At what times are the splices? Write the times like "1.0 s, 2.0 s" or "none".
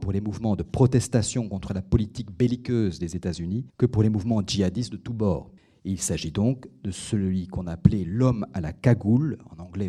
3.7 s, 5.6 s

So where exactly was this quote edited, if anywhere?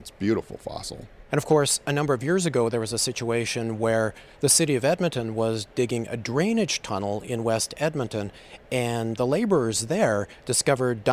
9.2 s

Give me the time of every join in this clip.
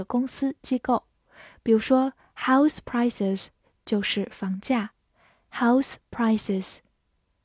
none

